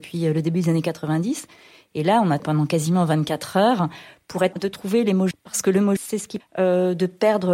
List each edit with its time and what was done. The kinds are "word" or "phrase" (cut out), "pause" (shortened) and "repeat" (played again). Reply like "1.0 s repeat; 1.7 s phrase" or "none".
2.4 s word; 4.5 s word; 5.3 s word; 6.0 s word; 6.4 s word